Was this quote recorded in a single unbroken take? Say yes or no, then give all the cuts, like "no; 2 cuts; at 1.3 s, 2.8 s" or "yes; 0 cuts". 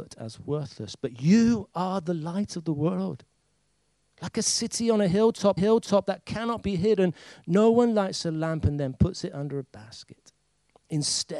no; 1 cut; at 5.6 s